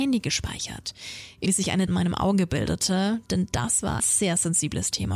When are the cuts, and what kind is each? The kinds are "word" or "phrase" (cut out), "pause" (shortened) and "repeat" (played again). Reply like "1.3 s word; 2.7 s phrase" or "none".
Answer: 1.5 s phrase; 1.9 s word; 4.0 s word